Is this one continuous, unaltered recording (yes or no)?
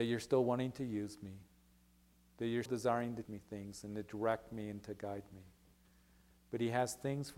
no